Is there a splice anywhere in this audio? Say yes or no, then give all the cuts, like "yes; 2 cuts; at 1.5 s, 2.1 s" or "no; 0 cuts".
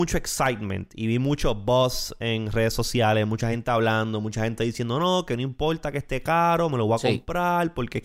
no; 0 cuts